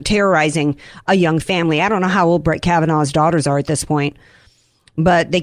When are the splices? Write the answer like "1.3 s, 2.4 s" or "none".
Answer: none